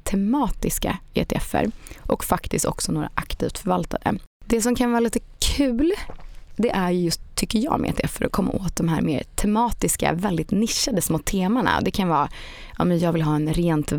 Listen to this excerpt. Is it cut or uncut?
uncut